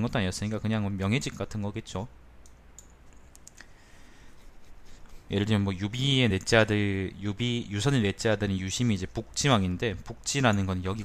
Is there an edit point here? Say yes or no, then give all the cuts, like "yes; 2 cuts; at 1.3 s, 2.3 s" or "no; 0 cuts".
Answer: no; 0 cuts